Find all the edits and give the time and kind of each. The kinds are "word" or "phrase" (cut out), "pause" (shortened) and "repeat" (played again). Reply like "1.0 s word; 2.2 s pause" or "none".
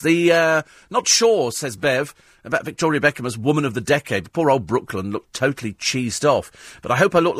none